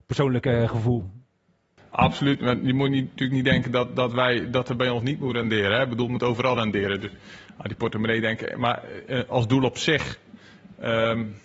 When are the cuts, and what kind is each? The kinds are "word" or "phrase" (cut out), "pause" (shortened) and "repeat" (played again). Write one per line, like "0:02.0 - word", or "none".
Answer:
none